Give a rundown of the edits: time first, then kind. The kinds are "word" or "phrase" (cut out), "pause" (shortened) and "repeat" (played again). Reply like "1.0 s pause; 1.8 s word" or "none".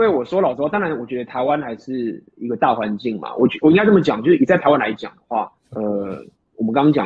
5.6 s pause